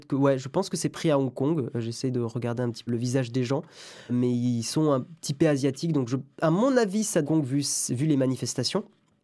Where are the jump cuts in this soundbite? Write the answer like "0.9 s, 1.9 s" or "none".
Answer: 2.9 s, 4.1 s, 7.2 s